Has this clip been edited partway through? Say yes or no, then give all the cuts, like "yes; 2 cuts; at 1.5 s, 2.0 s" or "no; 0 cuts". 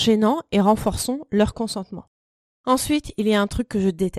no; 0 cuts